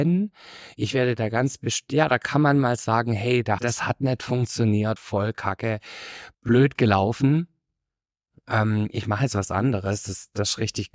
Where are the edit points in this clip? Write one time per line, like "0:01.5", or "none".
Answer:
0:03.6
0:05.0
0:06.3